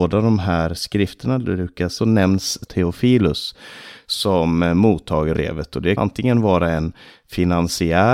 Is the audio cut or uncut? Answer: cut